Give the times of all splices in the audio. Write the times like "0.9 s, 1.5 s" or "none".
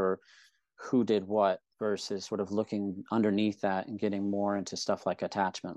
1.7 s